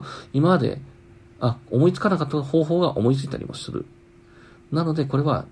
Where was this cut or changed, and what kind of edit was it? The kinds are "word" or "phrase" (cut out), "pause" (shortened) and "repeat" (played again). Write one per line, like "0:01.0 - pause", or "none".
none